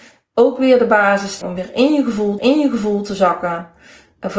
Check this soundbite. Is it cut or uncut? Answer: cut